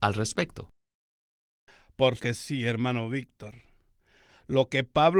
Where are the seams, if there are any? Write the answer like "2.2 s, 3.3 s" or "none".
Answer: 2.2 s